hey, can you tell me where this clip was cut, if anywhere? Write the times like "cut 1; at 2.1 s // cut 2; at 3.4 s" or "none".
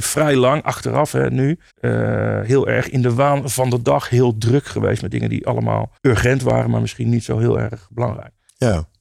cut 1; at 1.7 s // cut 2; at 6.0 s